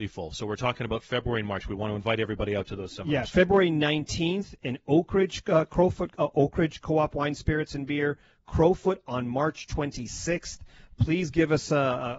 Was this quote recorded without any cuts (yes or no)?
yes